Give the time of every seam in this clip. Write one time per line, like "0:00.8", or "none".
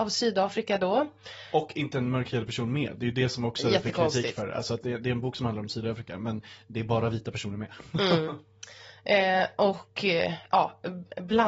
none